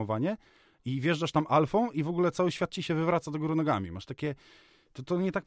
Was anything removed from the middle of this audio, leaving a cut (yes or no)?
no